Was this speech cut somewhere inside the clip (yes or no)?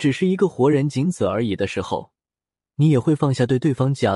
no